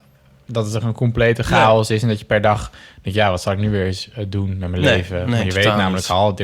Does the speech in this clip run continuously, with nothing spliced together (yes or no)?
yes